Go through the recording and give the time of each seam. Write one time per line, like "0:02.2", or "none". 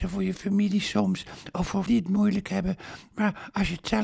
0:01.9

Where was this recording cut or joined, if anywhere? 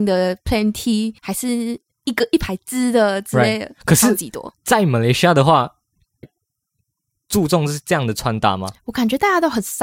0:01.2
0:06.2

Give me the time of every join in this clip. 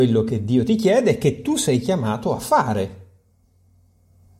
none

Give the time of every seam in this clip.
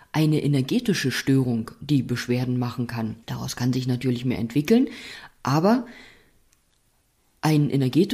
0:03.2

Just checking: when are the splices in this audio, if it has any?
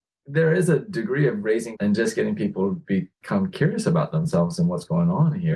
0:01.7

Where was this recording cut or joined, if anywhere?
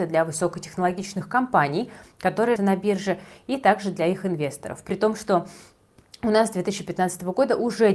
0:02.6

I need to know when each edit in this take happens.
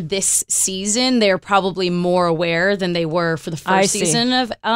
none

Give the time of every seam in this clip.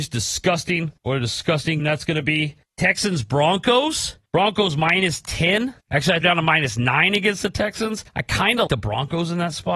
0:01.0
0:01.8
0:02.6
0:04.3
0:05.8
0:06.2
0:08.1
0:08.7

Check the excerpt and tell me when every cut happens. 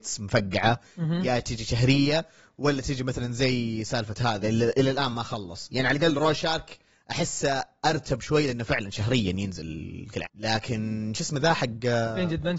0:04.4
0:10.2

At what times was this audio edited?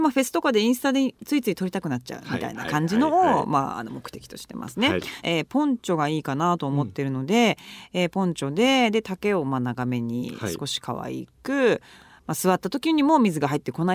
0:05.2

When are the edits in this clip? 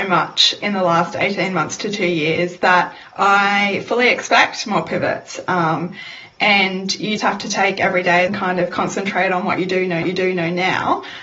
0:07.2
0:08.3
0:10.0

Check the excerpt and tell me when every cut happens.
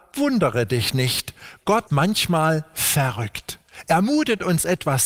0:01.9

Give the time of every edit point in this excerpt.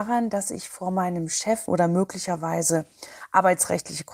0:01.7

